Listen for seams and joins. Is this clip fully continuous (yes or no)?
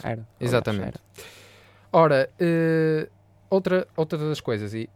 yes